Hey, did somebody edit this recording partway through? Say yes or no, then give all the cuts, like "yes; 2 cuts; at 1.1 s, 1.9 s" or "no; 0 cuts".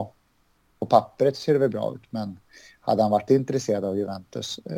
yes; 1 cut; at 3.3 s